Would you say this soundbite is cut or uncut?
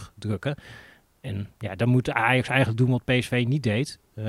uncut